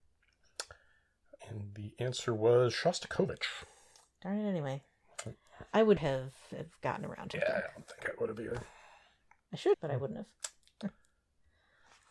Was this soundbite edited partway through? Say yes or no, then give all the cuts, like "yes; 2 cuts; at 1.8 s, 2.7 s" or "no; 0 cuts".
yes; 4 cuts; at 1.4 s, 6.0 s, 7.3 s, 9.7 s